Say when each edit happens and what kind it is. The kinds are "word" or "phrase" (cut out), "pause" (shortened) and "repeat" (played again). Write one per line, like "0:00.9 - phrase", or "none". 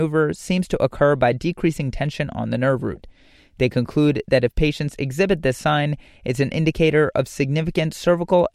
none

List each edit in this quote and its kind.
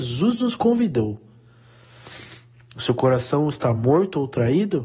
none

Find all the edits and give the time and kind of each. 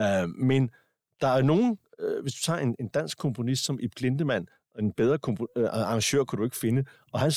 none

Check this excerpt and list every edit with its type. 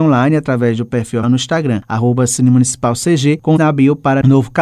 0:01.2 - word
0:03.6 - word

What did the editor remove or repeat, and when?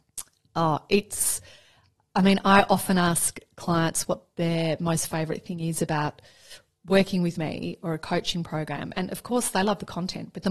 none

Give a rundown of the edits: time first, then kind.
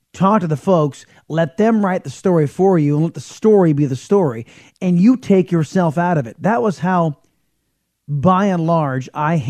none

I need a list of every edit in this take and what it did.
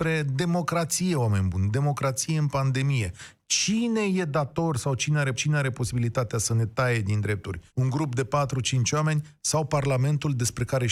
0:05.3 - repeat
0:07.7 - pause

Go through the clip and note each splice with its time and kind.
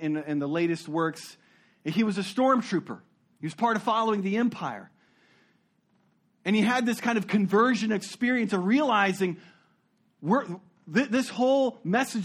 none

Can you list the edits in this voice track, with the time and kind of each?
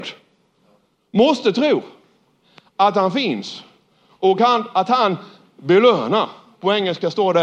none

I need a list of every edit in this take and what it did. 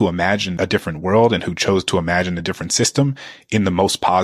none

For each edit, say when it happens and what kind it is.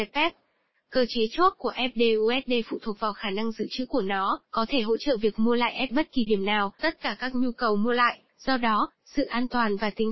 0:04.4 - pause
0:05.9 - phrase
0:06.3 - word
0:06.8 - word
0:08.3 - pause

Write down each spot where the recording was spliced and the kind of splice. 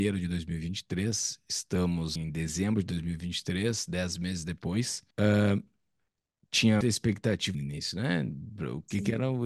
0:02.2 - word
0:05.1 - pause
0:06.8 - word
0:07.5 - phrase

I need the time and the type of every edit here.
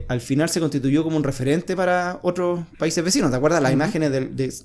0:02.7 - pause

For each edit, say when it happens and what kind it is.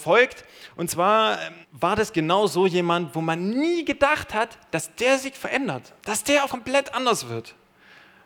0:01.6 - pause
0:06.0 - pause
0:06.5 - word

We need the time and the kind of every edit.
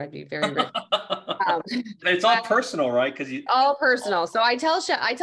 0:02.0 - word
0:03.5 - word

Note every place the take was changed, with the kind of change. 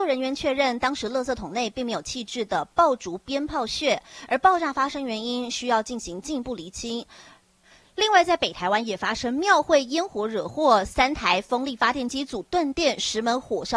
none

